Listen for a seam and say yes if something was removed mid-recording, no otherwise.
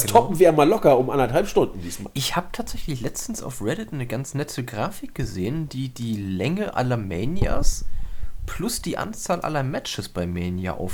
no